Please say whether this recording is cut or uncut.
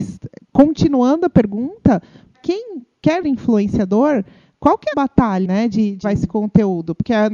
cut